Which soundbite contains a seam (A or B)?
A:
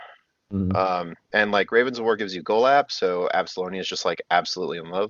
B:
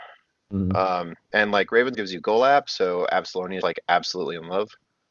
B